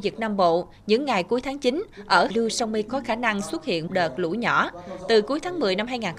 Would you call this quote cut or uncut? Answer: cut